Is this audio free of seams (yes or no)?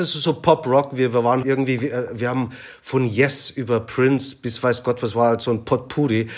no